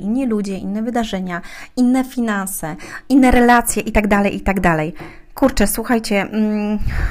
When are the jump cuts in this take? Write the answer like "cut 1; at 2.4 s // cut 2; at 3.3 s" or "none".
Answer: none